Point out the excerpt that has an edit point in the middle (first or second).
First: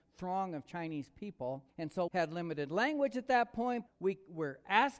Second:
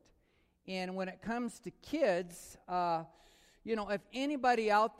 first